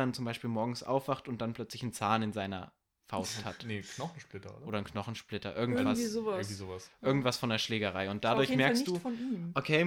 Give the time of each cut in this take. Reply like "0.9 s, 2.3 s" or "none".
none